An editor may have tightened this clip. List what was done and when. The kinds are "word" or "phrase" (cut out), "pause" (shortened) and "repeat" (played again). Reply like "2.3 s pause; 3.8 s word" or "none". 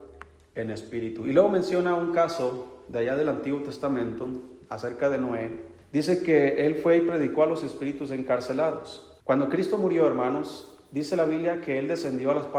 5.8 s pause; 9.2 s pause